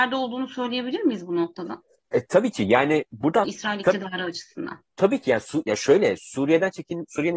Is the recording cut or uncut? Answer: cut